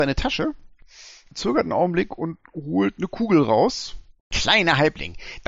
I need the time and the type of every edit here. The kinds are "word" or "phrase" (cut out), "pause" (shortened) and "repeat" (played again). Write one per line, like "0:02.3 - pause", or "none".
none